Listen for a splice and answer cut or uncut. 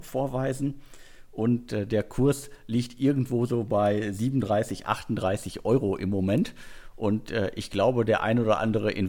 uncut